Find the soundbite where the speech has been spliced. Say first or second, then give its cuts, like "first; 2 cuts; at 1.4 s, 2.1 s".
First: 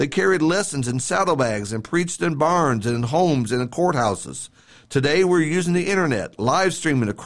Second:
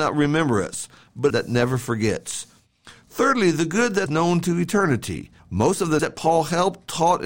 second; 4 cuts; at 1.3 s, 4.1 s, 5.4 s, 6.0 s